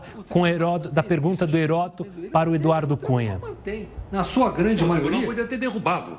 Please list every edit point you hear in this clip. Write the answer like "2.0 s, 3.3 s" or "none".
none